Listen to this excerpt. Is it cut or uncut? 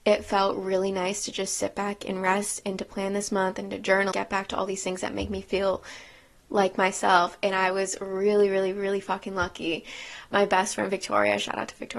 cut